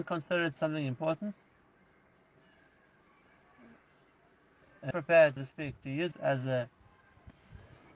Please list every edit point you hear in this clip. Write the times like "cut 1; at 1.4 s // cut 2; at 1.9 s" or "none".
cut 1; at 4.9 s // cut 2; at 5.4 s // cut 3; at 6.1 s